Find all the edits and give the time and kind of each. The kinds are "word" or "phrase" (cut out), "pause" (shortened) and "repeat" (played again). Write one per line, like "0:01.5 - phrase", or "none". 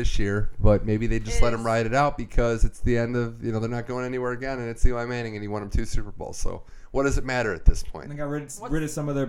none